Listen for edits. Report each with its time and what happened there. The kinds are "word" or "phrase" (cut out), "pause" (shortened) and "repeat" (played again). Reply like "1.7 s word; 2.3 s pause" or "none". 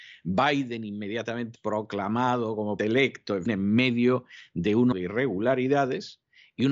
1.6 s word; 2.8 s word; 3.5 s word; 4.9 s word